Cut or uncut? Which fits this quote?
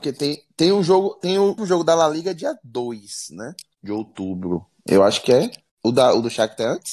cut